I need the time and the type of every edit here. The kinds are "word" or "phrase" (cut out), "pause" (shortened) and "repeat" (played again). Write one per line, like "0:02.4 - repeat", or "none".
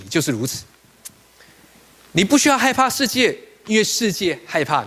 none